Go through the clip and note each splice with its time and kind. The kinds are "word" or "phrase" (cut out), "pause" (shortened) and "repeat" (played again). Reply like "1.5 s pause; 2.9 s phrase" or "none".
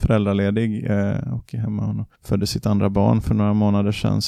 2.2 s pause